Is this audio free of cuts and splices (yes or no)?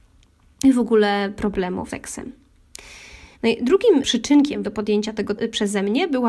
no